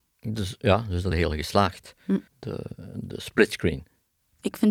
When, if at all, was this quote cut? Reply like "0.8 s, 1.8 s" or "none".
1.1 s, 2.3 s